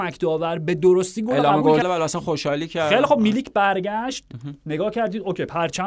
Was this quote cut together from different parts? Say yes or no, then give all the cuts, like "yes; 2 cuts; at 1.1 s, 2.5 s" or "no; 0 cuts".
yes; 1 cut; at 1.8 s